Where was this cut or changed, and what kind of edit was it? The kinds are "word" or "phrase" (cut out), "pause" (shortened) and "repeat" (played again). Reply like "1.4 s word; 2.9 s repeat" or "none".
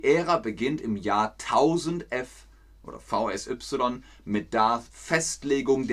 4.9 s word